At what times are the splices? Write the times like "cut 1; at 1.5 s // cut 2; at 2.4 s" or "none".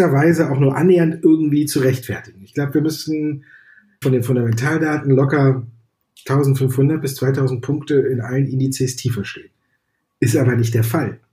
cut 1; at 4.0 s